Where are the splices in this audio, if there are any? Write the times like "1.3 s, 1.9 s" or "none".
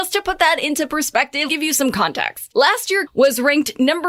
1.5 s, 3.1 s